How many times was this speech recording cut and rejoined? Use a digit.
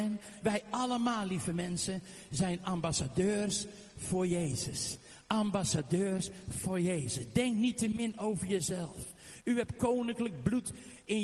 0